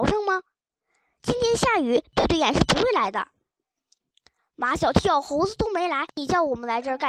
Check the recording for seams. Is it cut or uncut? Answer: uncut